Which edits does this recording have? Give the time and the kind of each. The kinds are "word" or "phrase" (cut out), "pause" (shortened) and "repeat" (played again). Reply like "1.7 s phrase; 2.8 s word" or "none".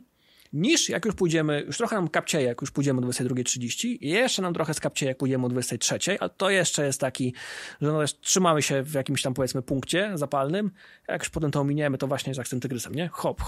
none